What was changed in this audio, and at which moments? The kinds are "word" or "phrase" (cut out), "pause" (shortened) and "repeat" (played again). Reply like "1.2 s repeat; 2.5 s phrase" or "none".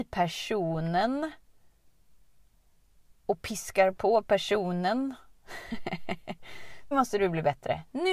6.9 s word